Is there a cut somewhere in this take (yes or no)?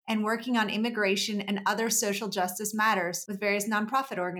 no